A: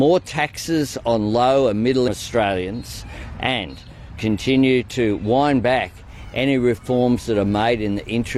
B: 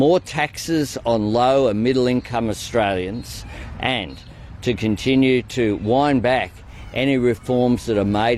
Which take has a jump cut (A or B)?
A